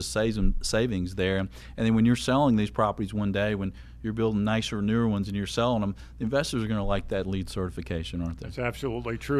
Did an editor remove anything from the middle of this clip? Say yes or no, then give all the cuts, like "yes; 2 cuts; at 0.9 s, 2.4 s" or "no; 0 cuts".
no; 0 cuts